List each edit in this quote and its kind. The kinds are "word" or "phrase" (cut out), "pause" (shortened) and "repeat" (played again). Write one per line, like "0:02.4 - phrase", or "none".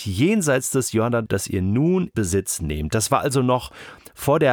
0:01.3 - word
0:02.1 - word